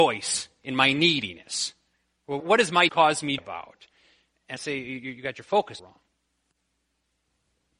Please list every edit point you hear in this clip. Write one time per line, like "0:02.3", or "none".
0:02.4
0:02.9
0:03.4
0:04.6
0:05.8

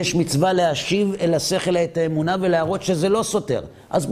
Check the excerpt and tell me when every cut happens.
none

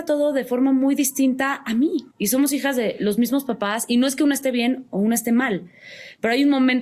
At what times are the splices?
0:02.1

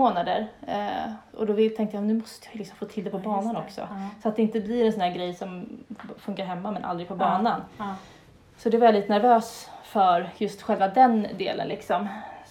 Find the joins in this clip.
none

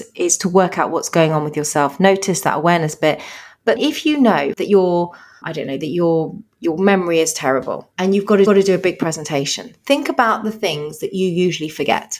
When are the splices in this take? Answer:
0:03.8
0:04.5
0:05.4
0:07.9
0:08.5

